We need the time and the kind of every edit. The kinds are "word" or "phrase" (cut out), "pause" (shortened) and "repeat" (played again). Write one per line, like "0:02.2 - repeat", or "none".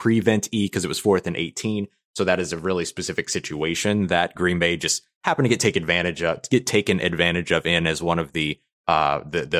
none

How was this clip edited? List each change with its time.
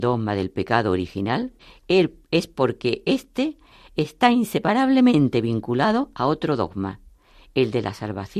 0:01.6 - pause

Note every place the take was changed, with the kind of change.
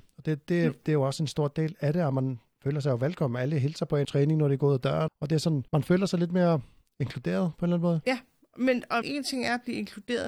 0:04.0 - phrase
0:05.1 - word
0:05.7 - pause
0:09.0 - word

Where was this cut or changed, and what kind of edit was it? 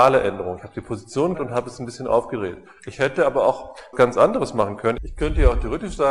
0:01.3 - word
0:03.9 - word

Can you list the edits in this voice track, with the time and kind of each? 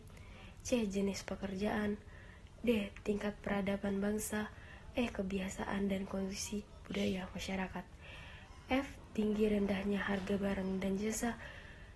none

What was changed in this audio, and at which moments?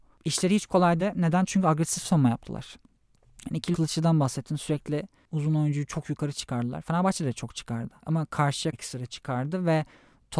0:01.0 - word
0:03.7 - phrase
0:08.0 - pause
0:08.7 - phrase

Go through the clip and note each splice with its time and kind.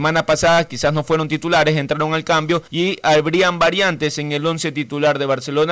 0:02.7 - pause

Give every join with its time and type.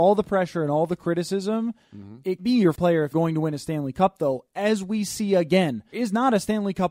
0:02.4 - word
0:02.7 - word
0:03.1 - word
0:05.9 - word

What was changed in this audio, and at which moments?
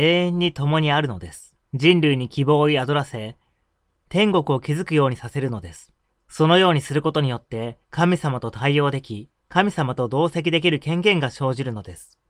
0:01.6 - pause
0:06.0 - pause
0:07.8 - pause
0:09.4 - pause

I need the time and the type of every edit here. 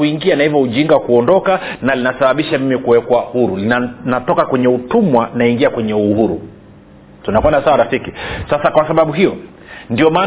none

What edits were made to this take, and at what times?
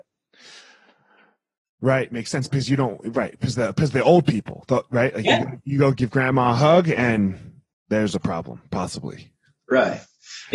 none

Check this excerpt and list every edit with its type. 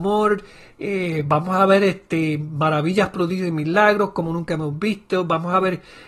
none

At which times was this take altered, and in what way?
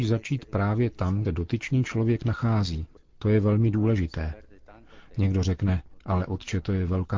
0:01.2 - phrase
0:03.0 - pause

